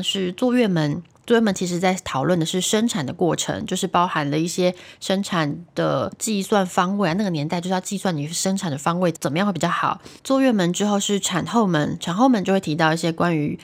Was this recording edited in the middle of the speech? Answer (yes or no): yes